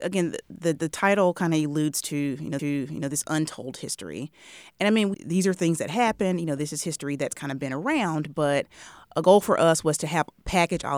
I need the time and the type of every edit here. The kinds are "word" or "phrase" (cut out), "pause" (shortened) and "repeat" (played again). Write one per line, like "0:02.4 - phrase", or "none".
0:02.6 - repeat
0:05.1 - phrase